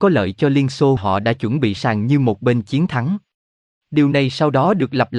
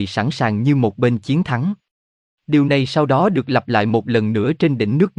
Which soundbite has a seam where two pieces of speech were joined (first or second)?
first